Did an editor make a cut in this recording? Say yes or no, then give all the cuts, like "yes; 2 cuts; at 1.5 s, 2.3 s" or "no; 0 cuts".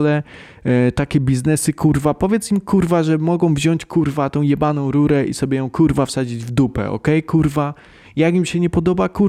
no; 0 cuts